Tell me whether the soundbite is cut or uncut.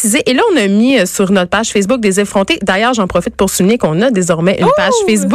uncut